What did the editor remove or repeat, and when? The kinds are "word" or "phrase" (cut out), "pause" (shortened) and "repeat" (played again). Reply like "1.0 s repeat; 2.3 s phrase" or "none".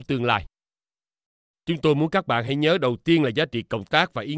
none